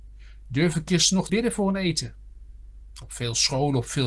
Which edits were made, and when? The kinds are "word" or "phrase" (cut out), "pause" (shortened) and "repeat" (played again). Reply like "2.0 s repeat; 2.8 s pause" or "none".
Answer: 1.3 s word